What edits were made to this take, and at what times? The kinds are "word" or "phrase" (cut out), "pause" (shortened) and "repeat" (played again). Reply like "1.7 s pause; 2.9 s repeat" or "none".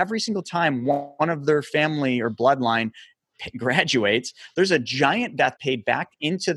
5.6 s word